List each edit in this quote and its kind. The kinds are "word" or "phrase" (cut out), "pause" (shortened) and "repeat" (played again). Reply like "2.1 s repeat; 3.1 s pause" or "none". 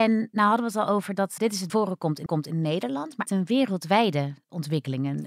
1.4 s word; 1.7 s phrase; 2.3 s repeat; 3.3 s phrase